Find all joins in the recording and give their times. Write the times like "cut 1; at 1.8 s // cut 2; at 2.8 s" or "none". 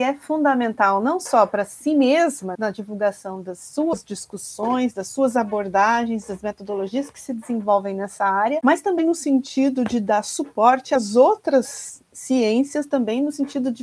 cut 1; at 2.5 s